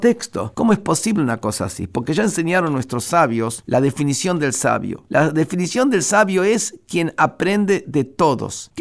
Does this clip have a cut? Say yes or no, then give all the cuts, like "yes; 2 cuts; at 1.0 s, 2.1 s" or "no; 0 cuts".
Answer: no; 0 cuts